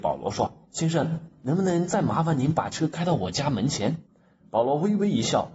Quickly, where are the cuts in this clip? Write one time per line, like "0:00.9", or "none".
0:01.4
0:04.1